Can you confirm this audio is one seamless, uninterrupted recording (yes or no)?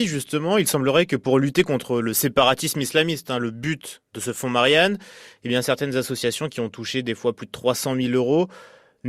yes